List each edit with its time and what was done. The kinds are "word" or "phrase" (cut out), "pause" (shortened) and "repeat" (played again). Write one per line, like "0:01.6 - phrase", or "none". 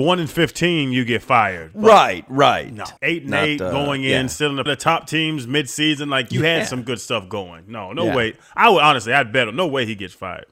0:03.0 - pause
0:04.7 - phrase